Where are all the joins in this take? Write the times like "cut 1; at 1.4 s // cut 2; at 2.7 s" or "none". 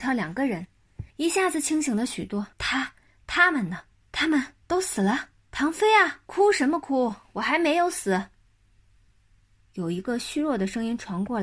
cut 1; at 1.1 s // cut 2; at 2.5 s // cut 3; at 3.9 s // cut 4; at 4.6 s // cut 5; at 5.4 s // cut 6; at 6.2 s

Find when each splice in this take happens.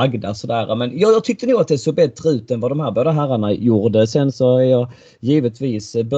none

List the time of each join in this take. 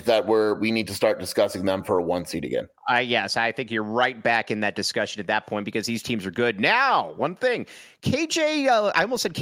none

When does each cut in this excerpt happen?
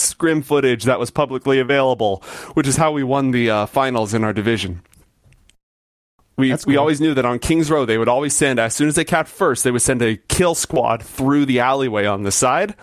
none

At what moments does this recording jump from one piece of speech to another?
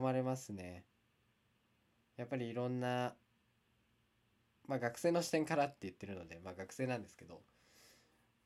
none

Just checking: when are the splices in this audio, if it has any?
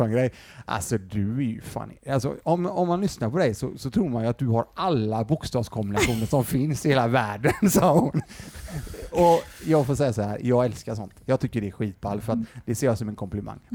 none

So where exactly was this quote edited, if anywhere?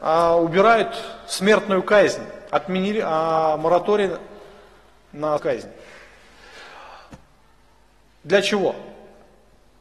cut 1; at 5.4 s

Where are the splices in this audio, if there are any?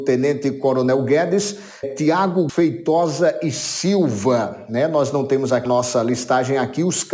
cut 1; at 1.8 s // cut 2; at 2.5 s // cut 3; at 5.6 s

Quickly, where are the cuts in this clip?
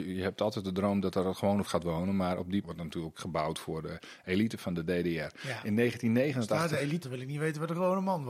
cut 1; at 1.7 s // cut 2; at 2.6 s // cut 3; at 3.1 s // cut 4; at 7.0 s

